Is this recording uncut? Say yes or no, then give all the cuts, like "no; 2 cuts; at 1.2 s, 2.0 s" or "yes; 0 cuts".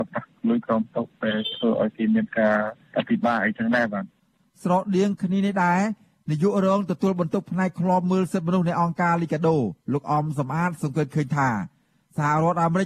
yes; 0 cuts